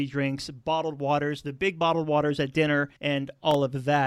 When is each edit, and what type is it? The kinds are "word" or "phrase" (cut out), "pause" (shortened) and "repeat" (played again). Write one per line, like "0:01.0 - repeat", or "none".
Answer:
0:03.0 - pause

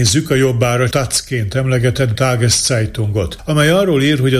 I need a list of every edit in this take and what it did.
0:00.9 - word
0:02.1 - word

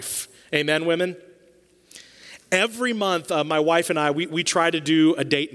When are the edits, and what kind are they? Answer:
none

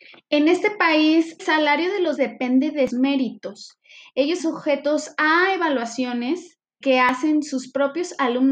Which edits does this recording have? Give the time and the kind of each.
0:01.4 - word
0:02.2 - word
0:02.9 - word
0:04.4 - word
0:06.8 - word

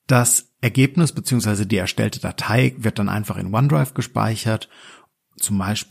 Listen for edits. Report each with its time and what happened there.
none

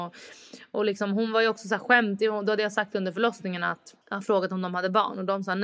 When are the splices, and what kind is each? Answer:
0:04.0 - pause

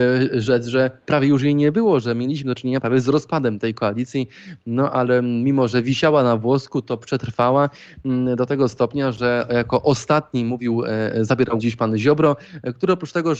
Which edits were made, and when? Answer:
0:11.6 - word

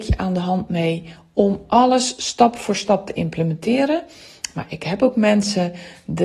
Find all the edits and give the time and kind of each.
none

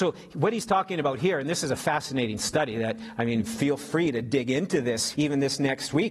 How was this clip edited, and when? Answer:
0:05.1 - word

